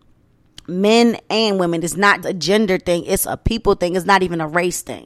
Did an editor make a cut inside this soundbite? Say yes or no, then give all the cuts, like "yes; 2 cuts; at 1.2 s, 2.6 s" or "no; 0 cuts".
yes; 1 cut; at 2.2 s